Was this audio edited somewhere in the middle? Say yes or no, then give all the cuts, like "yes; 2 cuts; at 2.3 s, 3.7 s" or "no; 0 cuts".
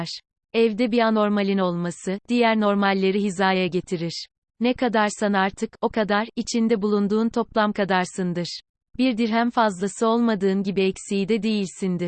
no; 0 cuts